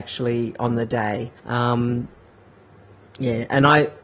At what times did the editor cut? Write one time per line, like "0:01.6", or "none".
0:01.4